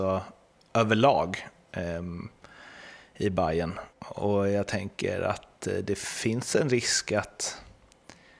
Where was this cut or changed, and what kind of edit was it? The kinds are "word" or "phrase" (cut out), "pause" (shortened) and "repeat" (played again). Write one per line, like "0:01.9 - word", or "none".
0:03.9 - pause